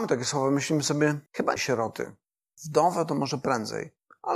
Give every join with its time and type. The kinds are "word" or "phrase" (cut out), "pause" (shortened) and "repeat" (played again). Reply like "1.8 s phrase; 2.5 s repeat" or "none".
1.3 s word; 1.6 s phrase